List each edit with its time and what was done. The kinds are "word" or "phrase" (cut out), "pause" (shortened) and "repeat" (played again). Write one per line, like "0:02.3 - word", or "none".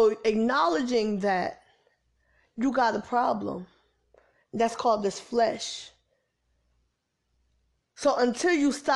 none